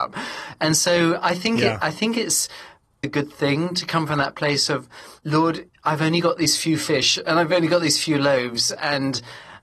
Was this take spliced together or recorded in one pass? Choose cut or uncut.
cut